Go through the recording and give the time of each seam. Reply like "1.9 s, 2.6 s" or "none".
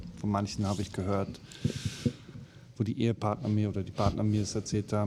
none